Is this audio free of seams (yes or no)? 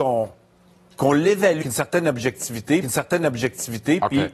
no